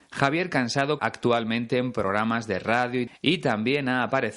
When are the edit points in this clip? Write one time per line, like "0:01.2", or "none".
0:01.0
0:03.1